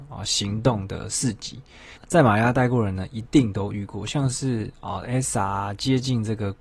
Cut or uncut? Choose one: cut